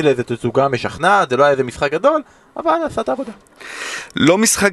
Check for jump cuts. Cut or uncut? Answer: uncut